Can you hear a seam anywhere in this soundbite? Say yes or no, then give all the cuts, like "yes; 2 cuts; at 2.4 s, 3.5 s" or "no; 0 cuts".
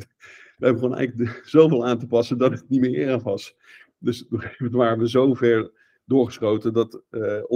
no; 0 cuts